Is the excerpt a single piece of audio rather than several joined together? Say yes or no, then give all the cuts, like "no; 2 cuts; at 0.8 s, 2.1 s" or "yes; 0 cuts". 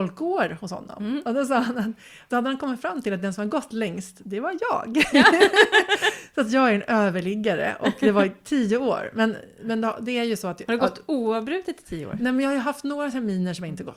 yes; 0 cuts